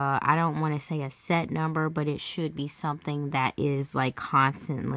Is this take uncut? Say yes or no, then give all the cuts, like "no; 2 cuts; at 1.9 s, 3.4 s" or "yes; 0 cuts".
yes; 0 cuts